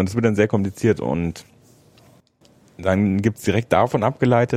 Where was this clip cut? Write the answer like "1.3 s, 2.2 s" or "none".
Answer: none